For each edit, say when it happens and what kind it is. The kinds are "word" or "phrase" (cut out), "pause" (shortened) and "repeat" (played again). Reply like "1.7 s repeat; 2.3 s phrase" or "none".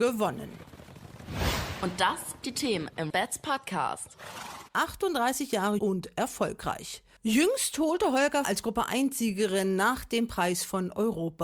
2.4 s word; 3.1 s word; 4.7 s pause; 5.8 s phrase; 8.4 s phrase